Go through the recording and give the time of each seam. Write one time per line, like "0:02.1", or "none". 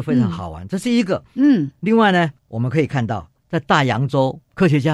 0:02.4
0:03.4